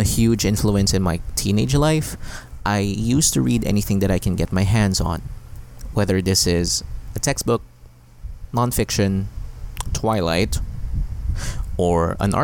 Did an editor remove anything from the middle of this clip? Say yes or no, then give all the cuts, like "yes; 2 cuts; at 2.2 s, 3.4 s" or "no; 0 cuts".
no; 0 cuts